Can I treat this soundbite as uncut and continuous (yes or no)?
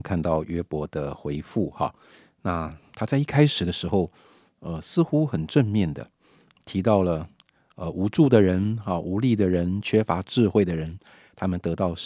yes